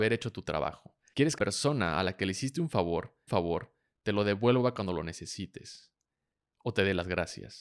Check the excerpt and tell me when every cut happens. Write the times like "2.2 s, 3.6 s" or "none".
1.4 s, 3.3 s